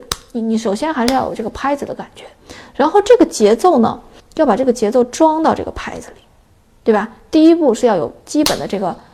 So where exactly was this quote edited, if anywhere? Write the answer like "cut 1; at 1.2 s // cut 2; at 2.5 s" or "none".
cut 1; at 4.2 s